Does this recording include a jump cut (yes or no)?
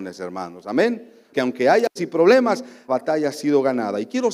yes